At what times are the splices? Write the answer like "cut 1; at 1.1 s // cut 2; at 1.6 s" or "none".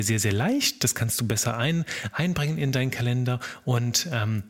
none